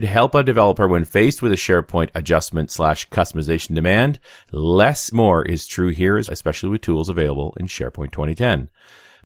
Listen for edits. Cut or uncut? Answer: cut